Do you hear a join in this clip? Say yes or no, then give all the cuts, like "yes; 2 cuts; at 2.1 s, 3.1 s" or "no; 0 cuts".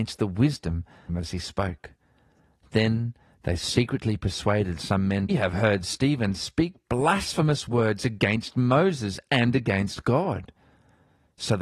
yes; 2 cuts; at 1.1 s, 5.3 s